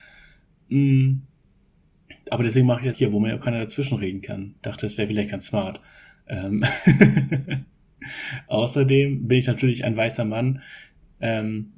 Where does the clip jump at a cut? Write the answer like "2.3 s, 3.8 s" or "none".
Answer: 2.9 s